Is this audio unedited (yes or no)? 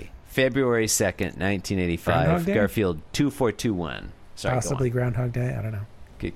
yes